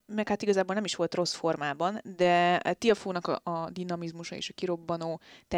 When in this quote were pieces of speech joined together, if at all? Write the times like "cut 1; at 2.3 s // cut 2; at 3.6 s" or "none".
none